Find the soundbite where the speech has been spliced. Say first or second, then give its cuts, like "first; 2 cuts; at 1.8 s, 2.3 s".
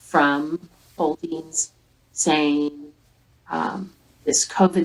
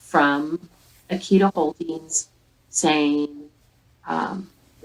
first; 1 cut; at 1.0 s